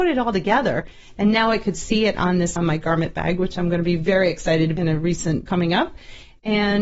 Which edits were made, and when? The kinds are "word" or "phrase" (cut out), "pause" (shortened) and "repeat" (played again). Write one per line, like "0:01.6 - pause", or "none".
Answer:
0:02.6 - word
0:04.8 - word
0:05.5 - word